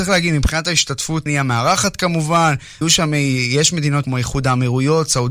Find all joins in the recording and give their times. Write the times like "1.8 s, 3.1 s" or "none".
1.3 s, 2.8 s, 4.0 s